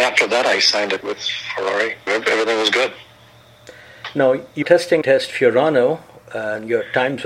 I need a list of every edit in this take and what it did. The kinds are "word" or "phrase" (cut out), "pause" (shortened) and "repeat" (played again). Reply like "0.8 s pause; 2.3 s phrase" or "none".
1.0 s word; 2.1 s word; 4.6 s word; 5.0 s phrase